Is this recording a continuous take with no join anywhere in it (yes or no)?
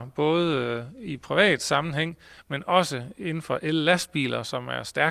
yes